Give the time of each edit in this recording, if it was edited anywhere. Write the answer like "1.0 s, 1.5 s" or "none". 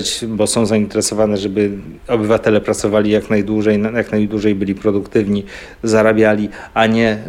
2.0 s